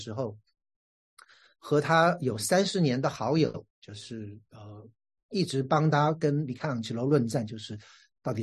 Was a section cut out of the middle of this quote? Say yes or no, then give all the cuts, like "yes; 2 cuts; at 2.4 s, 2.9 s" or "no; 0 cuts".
yes; 1 cut; at 3.7 s